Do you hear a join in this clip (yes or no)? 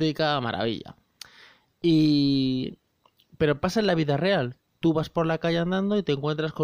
no